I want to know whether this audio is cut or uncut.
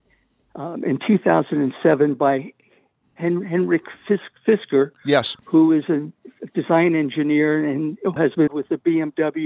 cut